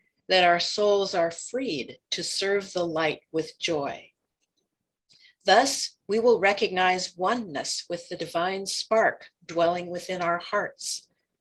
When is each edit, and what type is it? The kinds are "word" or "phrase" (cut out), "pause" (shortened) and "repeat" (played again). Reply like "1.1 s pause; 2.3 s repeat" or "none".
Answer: none